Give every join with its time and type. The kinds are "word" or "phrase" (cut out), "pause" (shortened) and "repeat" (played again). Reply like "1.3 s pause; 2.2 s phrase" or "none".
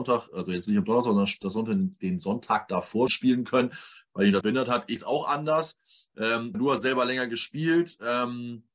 3.1 s word; 4.4 s phrase; 5.0 s word; 6.5 s word